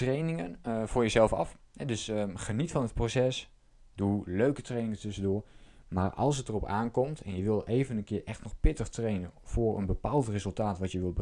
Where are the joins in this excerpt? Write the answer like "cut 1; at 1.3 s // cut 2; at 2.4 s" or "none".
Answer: none